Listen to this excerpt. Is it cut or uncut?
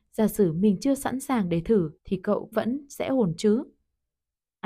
cut